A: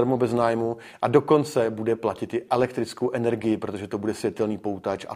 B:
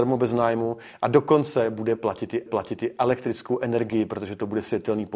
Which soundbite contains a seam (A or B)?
B